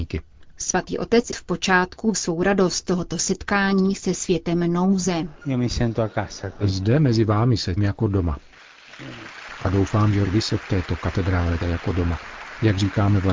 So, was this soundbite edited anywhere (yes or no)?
yes